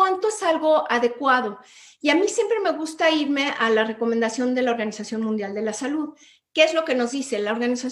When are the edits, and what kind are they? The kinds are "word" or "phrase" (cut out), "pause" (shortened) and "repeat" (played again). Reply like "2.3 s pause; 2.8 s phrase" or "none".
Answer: none